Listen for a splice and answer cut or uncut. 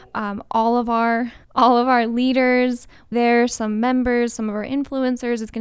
cut